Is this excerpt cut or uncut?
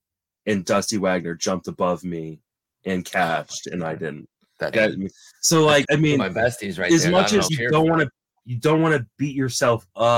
cut